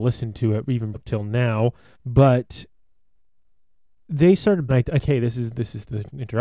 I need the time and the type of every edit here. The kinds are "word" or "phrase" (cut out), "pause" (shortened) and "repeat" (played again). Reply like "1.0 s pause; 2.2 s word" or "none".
0.9 s word; 1.9 s pause; 4.7 s phrase; 5.0 s phrase